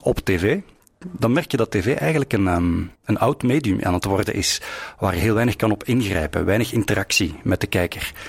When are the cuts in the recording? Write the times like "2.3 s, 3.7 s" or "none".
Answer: 3.0 s

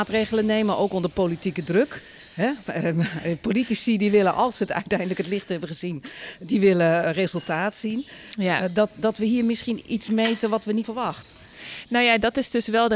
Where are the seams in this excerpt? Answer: 10.8 s

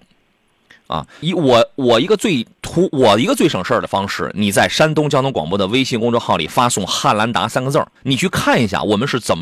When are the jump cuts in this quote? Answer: 1.2 s, 8.0 s

